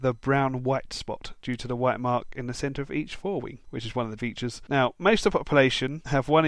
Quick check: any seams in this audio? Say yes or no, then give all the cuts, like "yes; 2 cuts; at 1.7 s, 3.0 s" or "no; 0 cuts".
yes; 1 cut; at 4.2 s